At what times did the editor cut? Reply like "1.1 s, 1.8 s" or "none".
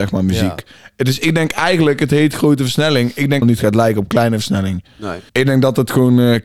3.4 s, 5.3 s